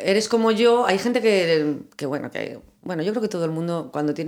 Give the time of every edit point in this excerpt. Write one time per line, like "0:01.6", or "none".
none